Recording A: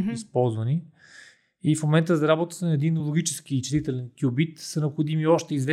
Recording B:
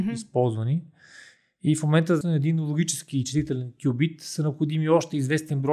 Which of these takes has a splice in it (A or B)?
B